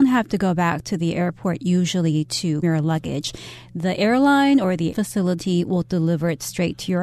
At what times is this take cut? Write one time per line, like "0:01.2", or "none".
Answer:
0:02.6
0:04.9